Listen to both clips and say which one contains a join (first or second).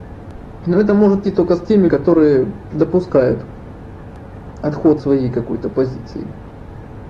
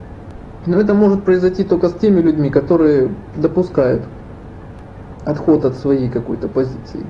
first